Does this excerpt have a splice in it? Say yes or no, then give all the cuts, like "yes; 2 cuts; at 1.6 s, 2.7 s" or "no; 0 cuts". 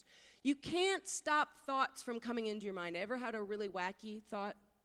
no; 0 cuts